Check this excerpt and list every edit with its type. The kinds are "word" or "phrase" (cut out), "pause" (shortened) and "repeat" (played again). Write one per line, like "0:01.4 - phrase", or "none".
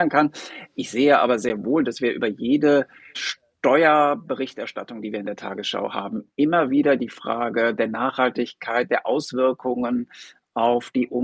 none